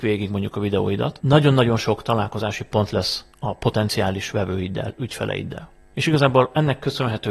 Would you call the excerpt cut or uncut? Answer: uncut